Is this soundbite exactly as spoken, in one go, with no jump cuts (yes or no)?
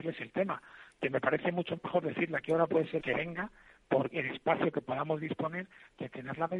no